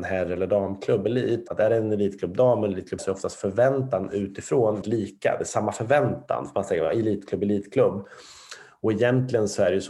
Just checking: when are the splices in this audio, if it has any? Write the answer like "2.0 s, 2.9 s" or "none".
1.5 s, 3.0 s, 4.8 s